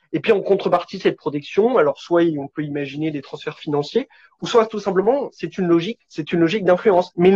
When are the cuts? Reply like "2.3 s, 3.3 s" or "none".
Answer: 6.0 s